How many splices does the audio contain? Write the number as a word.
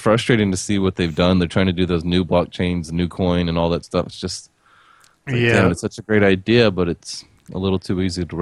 zero